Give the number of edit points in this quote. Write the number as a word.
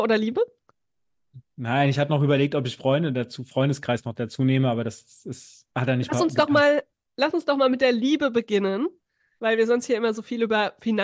one